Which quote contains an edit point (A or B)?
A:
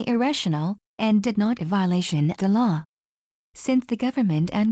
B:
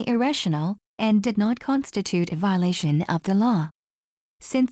A